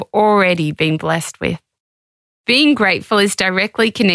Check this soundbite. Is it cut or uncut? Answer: uncut